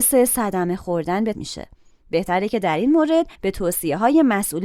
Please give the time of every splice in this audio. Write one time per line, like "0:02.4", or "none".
0:01.3
0:03.3